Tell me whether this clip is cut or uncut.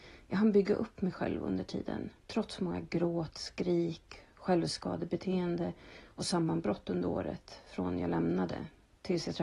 cut